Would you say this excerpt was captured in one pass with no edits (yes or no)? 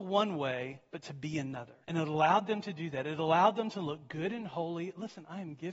no